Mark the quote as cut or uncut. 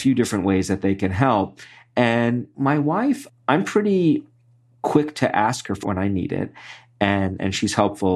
cut